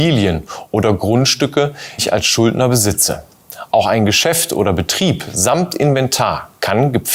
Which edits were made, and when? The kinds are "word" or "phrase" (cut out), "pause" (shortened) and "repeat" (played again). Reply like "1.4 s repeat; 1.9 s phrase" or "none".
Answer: 2.0 s word